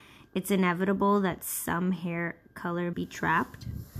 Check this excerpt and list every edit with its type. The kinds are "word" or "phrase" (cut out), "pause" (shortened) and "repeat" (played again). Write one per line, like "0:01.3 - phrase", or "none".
0:02.9 - word